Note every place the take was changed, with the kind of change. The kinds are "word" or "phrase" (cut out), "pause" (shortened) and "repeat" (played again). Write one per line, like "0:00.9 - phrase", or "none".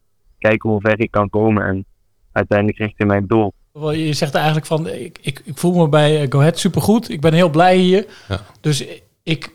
0:02.1 - pause